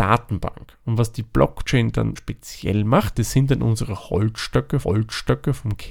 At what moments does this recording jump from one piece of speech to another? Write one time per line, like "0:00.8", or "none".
0:02.2
0:03.1
0:04.8